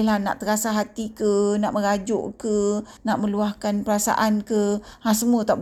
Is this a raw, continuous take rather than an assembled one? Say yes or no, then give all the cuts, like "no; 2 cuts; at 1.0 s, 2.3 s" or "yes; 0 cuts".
no; 1 cut; at 3.0 s